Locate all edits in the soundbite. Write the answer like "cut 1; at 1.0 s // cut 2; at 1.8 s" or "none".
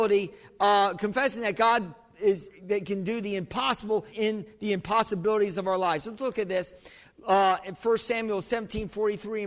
cut 1; at 4.1 s